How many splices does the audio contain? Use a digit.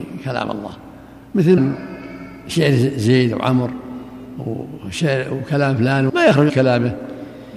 3